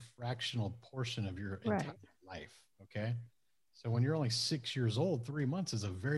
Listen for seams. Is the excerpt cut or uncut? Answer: uncut